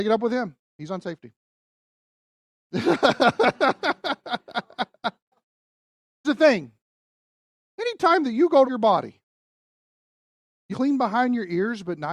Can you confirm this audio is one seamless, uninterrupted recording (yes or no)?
no